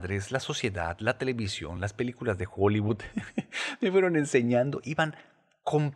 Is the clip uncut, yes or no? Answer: yes